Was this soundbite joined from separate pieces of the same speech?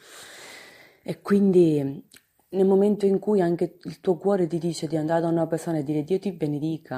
no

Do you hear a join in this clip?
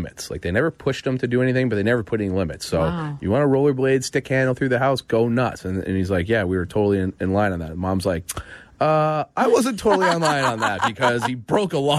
no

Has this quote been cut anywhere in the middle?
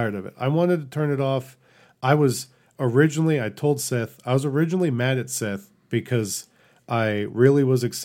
no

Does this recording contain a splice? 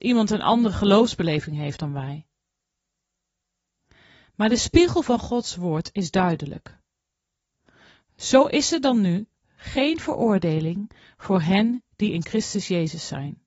no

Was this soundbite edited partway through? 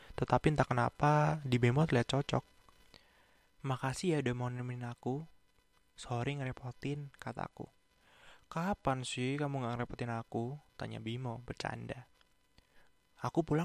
no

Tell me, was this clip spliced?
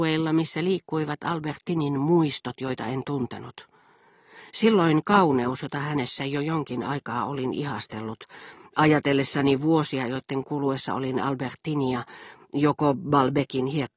no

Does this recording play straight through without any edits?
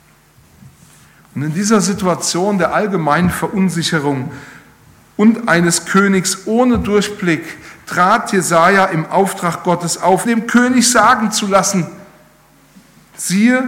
no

